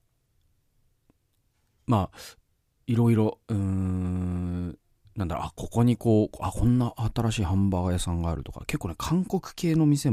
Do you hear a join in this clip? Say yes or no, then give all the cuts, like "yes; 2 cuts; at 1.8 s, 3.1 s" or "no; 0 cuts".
no; 0 cuts